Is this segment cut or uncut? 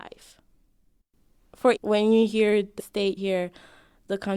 cut